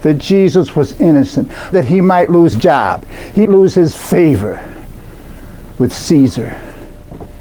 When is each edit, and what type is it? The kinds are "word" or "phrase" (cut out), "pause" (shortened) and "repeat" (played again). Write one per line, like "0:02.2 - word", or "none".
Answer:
0:01.7 - phrase
0:02.5 - word
0:03.5 - word